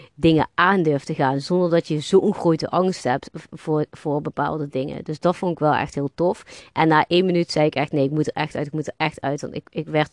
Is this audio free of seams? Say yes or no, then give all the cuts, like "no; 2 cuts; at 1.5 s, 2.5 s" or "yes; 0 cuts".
yes; 0 cuts